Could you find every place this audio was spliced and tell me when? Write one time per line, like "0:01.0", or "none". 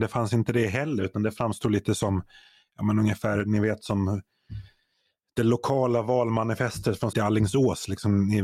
0:07.1

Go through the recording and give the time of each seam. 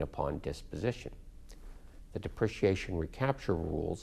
none

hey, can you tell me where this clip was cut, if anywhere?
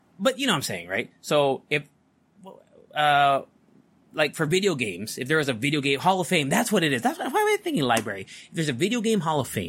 none

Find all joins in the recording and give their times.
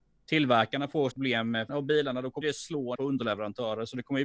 0:01.1
0:01.7
0:02.4
0:02.9

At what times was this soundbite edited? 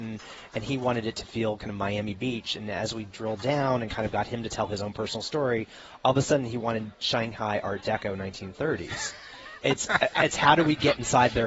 0:09.6

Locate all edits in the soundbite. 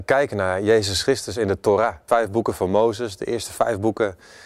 0:02.1

